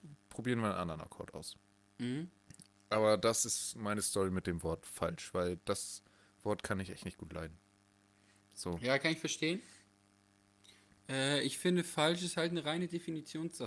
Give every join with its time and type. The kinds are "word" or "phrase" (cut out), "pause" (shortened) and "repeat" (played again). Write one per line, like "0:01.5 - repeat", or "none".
none